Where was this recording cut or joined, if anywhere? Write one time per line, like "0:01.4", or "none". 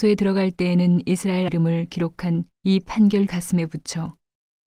0:01.5
0:02.5
0:03.3